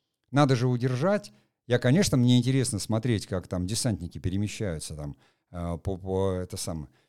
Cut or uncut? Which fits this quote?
uncut